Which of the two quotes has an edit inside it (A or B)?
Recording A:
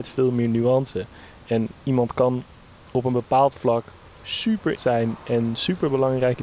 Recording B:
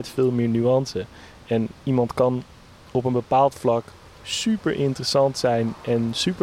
A